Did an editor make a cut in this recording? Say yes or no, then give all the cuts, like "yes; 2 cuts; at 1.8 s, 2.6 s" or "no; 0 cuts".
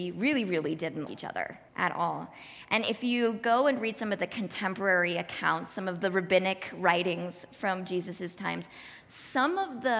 yes; 2 cuts; at 1.1 s, 1.7 s